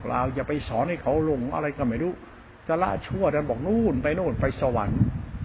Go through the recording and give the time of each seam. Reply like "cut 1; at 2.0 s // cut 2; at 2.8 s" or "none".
cut 1; at 2.6 s